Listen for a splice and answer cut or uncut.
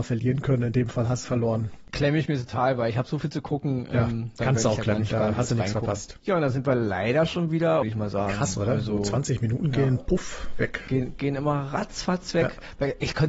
cut